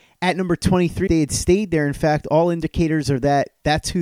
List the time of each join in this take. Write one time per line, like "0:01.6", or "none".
0:01.1